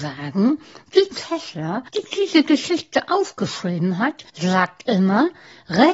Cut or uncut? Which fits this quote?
cut